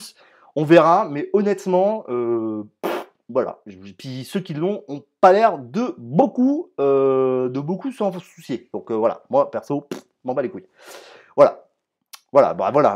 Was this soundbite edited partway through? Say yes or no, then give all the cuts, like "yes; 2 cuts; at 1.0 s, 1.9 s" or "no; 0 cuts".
no; 0 cuts